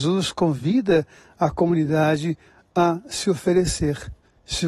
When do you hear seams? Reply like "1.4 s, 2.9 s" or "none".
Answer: none